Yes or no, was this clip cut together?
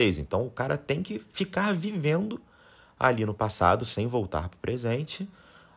no